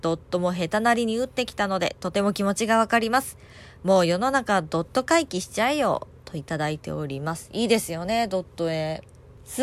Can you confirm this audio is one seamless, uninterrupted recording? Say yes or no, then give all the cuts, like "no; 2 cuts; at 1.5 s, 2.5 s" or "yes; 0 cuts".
yes; 0 cuts